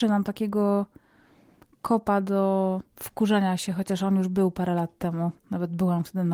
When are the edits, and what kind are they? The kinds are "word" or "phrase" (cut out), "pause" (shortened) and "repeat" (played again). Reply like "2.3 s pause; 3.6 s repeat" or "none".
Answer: 2.9 s pause; 5.4 s pause